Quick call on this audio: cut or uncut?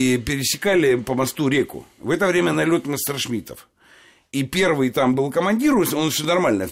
uncut